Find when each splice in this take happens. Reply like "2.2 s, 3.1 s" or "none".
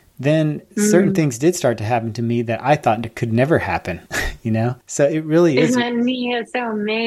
4.1 s, 4.8 s